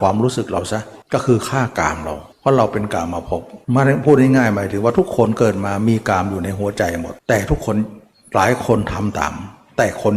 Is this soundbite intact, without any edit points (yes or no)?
no